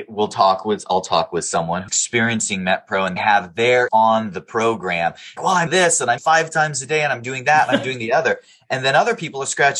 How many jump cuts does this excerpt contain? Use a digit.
6